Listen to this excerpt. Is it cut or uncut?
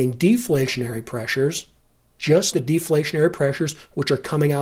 cut